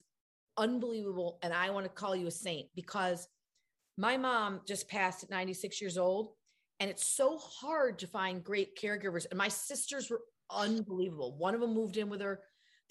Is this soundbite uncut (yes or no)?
yes